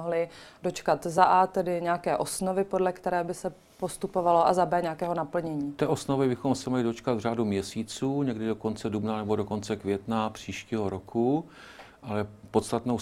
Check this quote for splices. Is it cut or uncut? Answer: uncut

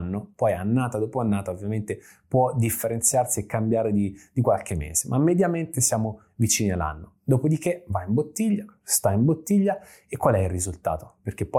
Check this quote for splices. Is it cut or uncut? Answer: uncut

